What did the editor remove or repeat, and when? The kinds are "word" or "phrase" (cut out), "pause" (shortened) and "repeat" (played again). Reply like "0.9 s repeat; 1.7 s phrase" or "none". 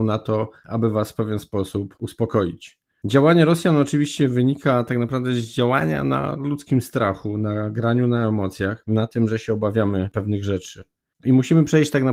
none